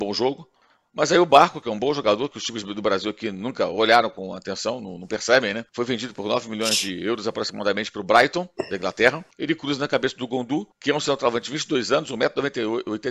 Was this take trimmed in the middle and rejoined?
yes; 3 cuts; at 5.7 s, 9.3 s, 10.7 s

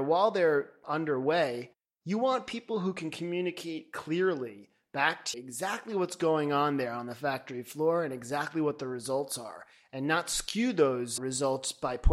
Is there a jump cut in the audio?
yes; 2 cuts; at 5.3 s, 11.2 s

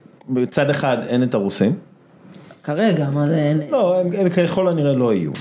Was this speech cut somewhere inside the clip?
no; 0 cuts

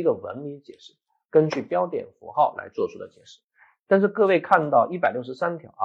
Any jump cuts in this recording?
no; 0 cuts

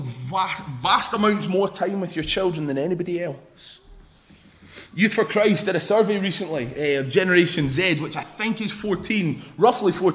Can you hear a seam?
no; 0 cuts

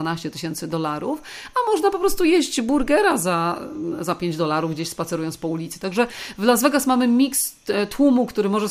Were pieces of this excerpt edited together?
no; 0 cuts

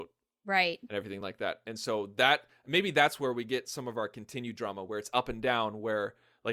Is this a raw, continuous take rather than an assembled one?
yes; 0 cuts

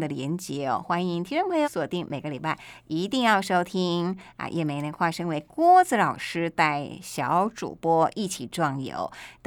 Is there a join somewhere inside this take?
yes; 1 cut; at 1.6 s

